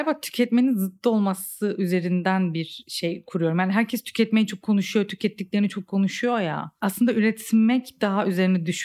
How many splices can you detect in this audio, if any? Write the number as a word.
zero